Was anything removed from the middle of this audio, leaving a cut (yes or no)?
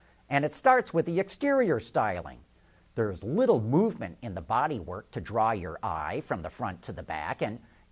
no